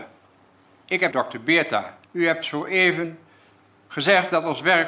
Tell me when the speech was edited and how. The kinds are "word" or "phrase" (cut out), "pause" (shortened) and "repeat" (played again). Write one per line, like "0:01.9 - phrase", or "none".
0:01.1 - phrase
0:02.0 - pause